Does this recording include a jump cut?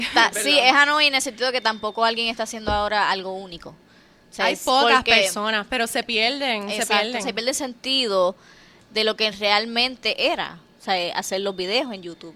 no; 0 cuts

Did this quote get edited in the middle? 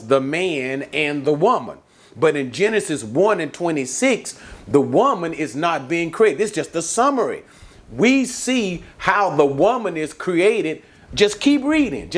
no; 0 cuts

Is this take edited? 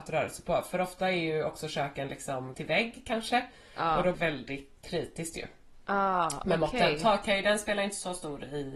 yes; 3 cuts; at 2.5 s, 4.1 s, 4.8 s

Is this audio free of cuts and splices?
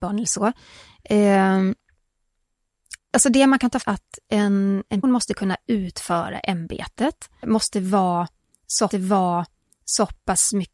no; 5 cuts; at 3.0 s, 3.8 s, 5.0 s, 7.4 s, 8.9 s

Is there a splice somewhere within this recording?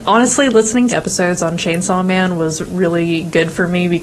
yes; 1 cut; at 0.9 s

